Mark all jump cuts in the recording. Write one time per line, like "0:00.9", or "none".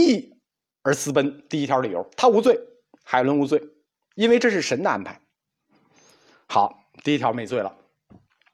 none